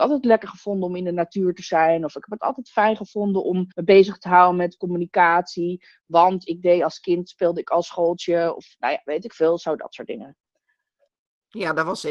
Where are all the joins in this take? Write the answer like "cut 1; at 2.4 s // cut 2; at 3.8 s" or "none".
cut 1; at 3.7 s